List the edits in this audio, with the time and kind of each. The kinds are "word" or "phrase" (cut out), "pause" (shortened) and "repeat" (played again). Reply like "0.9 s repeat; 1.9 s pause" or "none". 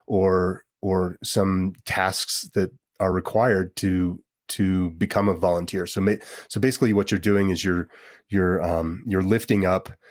none